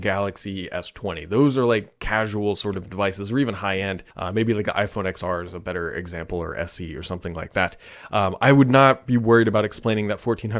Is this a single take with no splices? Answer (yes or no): no